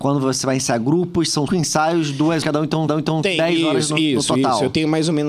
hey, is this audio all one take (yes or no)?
no